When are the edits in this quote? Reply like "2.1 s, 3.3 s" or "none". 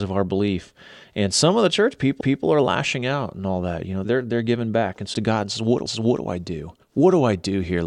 2.2 s, 4.0 s, 5.1 s, 5.9 s, 6.8 s